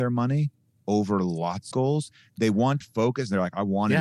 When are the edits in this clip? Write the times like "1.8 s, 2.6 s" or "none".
1.7 s, 2.8 s